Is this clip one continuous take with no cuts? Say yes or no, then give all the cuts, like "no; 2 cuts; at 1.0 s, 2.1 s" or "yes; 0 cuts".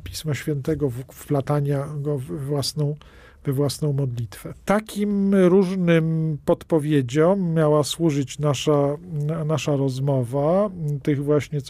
yes; 0 cuts